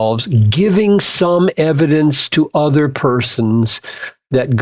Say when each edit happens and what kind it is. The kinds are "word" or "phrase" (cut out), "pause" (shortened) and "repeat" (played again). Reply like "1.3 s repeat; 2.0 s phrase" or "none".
none